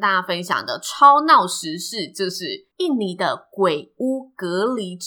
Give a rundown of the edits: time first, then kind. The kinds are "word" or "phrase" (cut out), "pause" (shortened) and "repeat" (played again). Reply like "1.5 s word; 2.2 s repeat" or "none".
2.7 s pause